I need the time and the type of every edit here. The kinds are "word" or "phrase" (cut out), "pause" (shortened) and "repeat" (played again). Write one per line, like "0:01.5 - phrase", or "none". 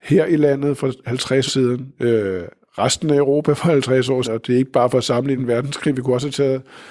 0:01.5 - word
0:04.2 - word
0:05.4 - word